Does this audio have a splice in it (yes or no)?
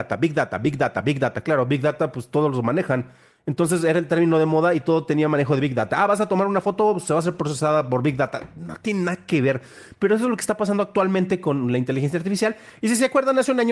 no